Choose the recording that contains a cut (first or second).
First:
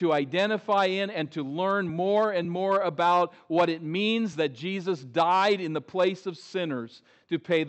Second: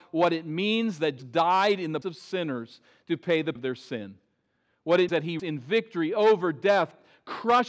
second